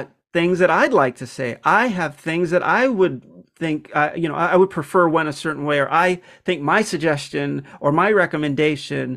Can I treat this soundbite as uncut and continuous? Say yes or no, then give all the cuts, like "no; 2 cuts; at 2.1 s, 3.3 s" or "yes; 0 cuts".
yes; 0 cuts